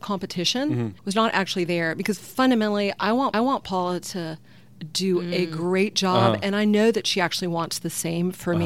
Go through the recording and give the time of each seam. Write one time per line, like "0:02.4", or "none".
0:01.0
0:03.3

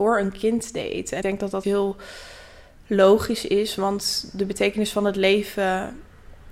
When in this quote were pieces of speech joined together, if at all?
0:01.2
0:01.6

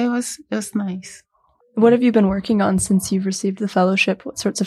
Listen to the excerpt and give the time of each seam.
none

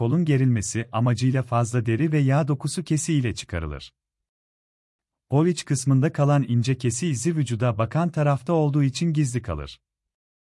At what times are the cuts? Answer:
none

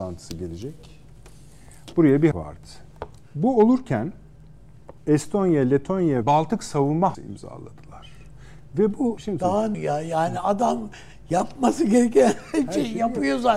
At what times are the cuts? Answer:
0:02.3
0:05.0
0:06.2
0:07.1
0:09.2
0:09.7

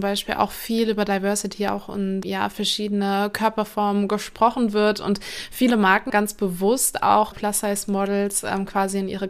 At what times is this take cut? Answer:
0:02.2
0:06.1
0:07.3

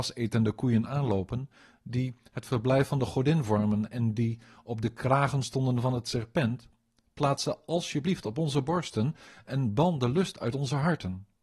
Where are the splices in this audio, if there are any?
none

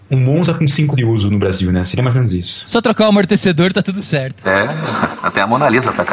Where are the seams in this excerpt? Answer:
0:00.9

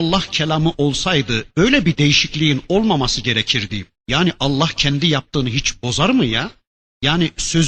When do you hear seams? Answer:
0:04.0

